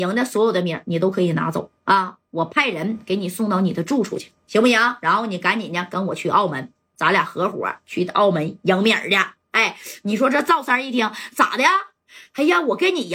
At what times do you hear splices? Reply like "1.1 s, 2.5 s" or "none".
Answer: 1.8 s